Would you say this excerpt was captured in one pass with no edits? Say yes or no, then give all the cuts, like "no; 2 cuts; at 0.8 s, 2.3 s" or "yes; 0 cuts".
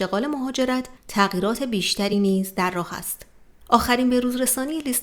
yes; 0 cuts